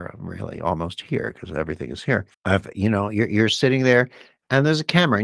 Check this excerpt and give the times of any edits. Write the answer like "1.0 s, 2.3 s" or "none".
2.3 s